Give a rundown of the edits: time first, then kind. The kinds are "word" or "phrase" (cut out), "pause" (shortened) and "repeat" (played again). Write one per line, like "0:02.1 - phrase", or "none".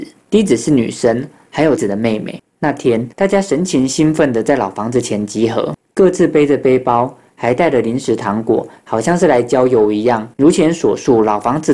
0:01.8 - word
0:03.1 - pause
0:10.3 - pause